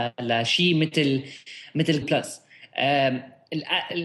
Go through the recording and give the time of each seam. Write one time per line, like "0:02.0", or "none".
0:02.0

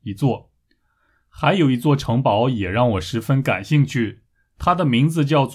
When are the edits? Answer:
none

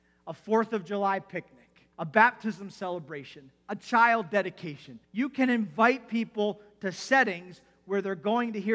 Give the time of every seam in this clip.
0:01.9
0:05.0

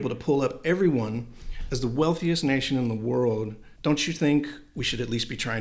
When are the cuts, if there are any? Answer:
0:03.8

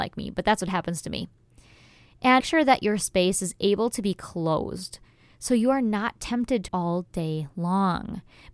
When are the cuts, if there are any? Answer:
0:02.4
0:06.7

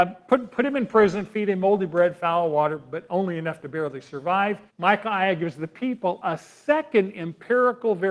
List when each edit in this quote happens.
0:04.7

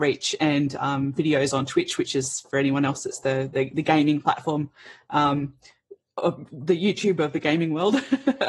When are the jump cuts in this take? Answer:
none

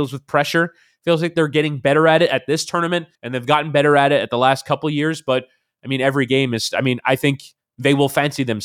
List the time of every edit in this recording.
0:03.2

